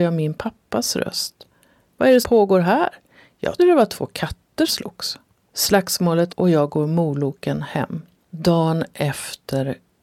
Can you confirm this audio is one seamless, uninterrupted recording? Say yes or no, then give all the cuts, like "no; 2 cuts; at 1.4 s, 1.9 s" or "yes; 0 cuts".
no; 4 cuts; at 2.2 s, 3.6 s, 4.7 s, 6.3 s